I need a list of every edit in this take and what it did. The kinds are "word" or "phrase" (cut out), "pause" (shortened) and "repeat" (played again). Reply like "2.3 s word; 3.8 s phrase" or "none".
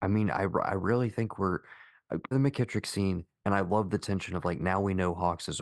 2.3 s phrase